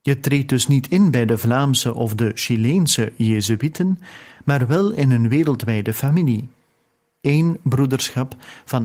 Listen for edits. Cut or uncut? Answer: uncut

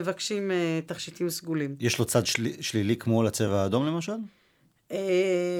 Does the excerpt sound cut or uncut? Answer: uncut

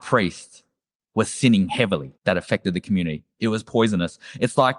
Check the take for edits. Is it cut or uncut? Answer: cut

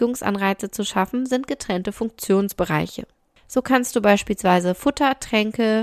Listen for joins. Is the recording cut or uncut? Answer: uncut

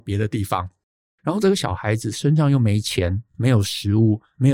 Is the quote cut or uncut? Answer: cut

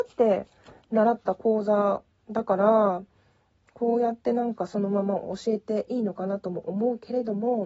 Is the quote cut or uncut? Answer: uncut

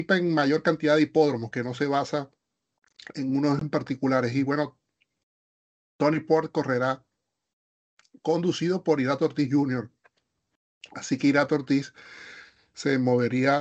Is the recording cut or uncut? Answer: uncut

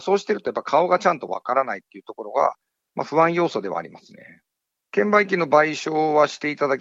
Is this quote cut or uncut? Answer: uncut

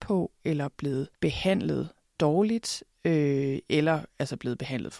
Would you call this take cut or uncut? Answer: cut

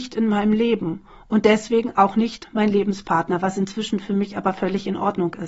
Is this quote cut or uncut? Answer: uncut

